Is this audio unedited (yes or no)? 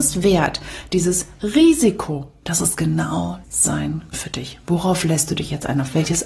no